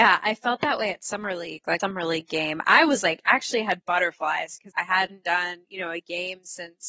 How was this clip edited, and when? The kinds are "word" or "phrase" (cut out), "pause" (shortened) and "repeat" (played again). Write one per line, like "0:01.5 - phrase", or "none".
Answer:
0:01.8 - phrase
0:04.7 - word

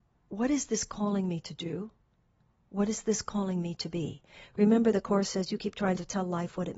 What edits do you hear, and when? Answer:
none

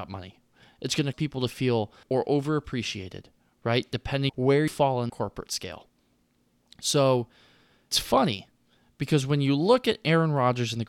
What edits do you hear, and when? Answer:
0:01.1 - word
0:02.0 - word
0:04.3 - word
0:04.7 - word
0:05.1 - word
0:07.9 - word

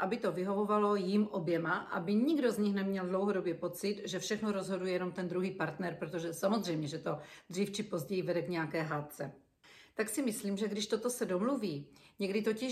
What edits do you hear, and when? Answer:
none

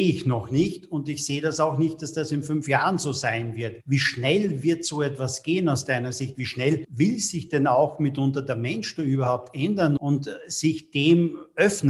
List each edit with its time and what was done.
0:10.0 - word

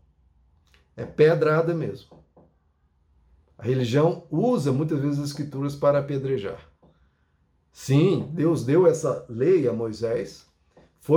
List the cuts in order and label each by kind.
none

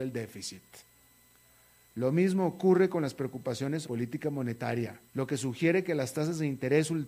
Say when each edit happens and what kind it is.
0:03.8 - phrase
0:05.1 - pause

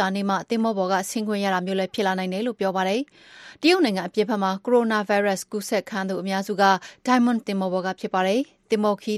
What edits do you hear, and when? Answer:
0:07.4 - word

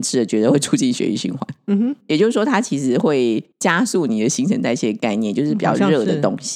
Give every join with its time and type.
0:03.5 - pause

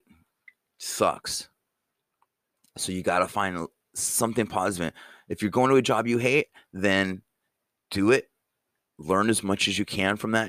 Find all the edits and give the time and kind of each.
none

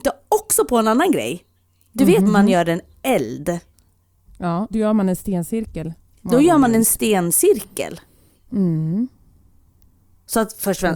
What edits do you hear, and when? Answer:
0:02.3 - word
0:04.7 - word

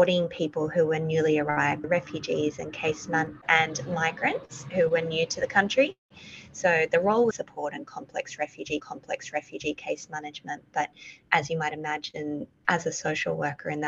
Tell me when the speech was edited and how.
0:01.8 - word
0:03.4 - phrase
0:07.3 - phrase
0:08.8 - repeat
0:12.6 - pause

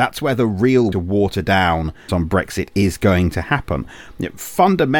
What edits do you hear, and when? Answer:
0:00.9 - phrase
0:02.1 - phrase

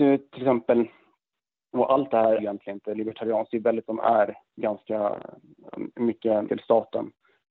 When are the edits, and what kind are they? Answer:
0:02.4 - word
0:03.9 - word
0:04.5 - pause
0:06.5 - word

